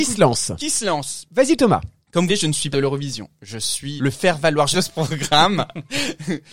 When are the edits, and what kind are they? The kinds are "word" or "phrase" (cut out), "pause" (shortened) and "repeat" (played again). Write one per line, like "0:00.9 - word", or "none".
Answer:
0:01.2 - word
0:02.3 - word
0:02.7 - phrase
0:04.0 - word
0:04.7 - phrase